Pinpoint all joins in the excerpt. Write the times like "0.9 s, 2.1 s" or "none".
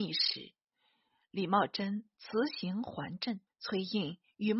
3.5 s